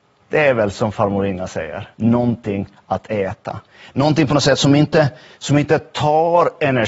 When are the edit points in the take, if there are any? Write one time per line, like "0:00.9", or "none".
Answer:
0:01.9